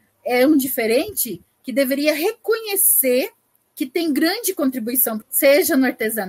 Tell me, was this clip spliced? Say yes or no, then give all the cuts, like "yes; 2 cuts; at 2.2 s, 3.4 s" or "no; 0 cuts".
yes; 1 cut; at 5.2 s